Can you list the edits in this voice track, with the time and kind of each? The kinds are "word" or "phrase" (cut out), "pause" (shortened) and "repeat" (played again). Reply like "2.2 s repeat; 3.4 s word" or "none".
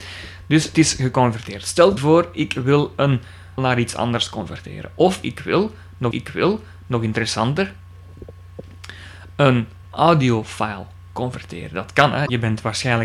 2.0 s phrase; 3.6 s phrase; 6.1 s repeat; 9.8 s phrase